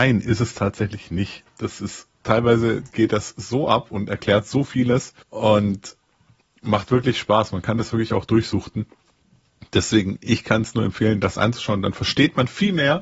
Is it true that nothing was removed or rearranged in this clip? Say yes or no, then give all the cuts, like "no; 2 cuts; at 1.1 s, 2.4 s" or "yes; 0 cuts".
no; 2 cuts; at 2.1 s, 5.2 s